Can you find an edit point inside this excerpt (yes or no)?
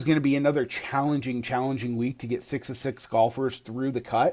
no